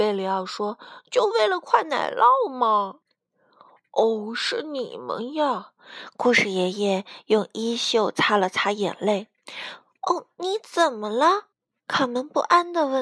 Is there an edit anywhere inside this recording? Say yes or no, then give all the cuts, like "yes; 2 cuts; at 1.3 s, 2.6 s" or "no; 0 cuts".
yes; 2 cuts; at 3.0 s, 11.5 s